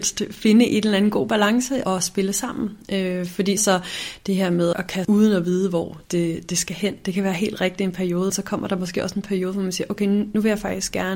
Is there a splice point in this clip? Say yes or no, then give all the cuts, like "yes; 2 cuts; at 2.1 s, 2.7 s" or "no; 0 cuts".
yes; 6 cuts; at 1.9 s, 3.6 s, 4.7 s, 5.0 s, 6.0 s, 8.3 s